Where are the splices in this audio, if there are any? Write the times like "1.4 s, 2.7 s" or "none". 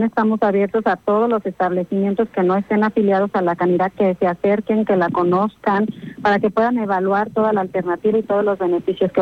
none